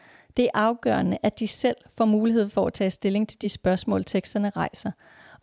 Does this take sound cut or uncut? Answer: uncut